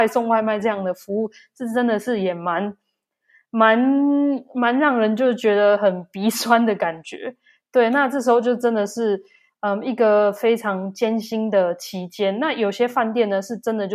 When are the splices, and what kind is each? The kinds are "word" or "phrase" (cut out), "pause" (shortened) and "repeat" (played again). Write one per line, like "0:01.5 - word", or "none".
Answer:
none